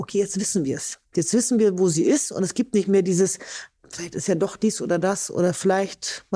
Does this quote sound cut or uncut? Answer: uncut